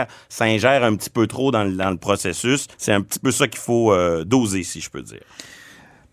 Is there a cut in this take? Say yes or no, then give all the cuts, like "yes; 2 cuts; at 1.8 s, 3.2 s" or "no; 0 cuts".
yes; 1 cut; at 2.7 s